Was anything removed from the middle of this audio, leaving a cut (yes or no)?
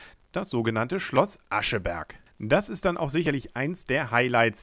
no